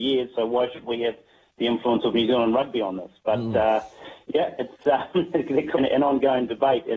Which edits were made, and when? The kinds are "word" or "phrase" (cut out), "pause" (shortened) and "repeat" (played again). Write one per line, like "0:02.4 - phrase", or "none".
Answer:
0:05.8 - word